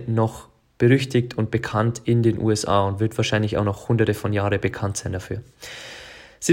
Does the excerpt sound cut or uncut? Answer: uncut